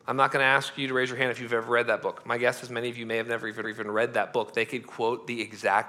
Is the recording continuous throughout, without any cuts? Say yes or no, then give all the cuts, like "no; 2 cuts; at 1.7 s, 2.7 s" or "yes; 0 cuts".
no; 1 cut; at 3.6 s